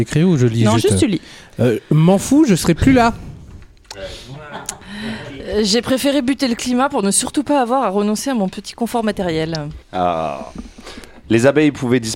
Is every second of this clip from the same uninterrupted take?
no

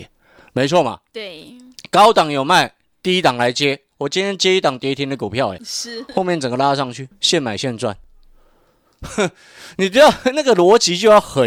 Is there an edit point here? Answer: yes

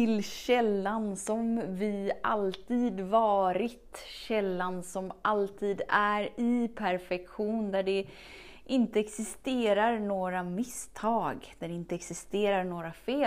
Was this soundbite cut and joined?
no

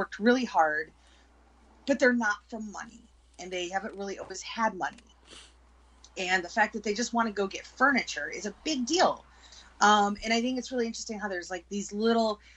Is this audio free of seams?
yes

